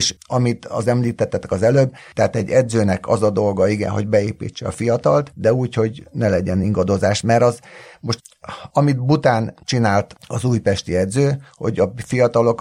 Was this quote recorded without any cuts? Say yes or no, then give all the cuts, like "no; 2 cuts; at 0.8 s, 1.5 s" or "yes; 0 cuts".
yes; 0 cuts